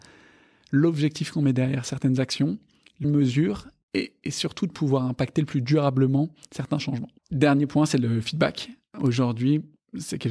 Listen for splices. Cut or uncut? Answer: cut